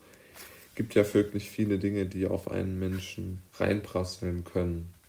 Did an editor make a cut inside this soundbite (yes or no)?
yes